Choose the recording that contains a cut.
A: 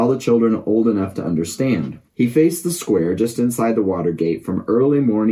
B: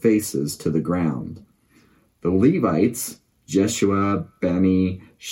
A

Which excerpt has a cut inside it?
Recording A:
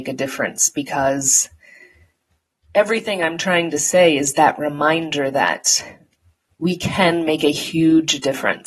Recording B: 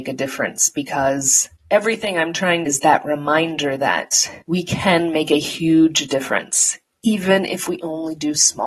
B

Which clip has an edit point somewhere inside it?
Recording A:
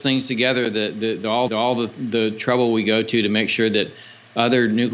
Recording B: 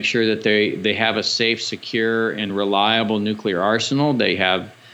A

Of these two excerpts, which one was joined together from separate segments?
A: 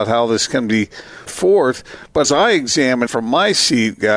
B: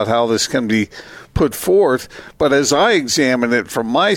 A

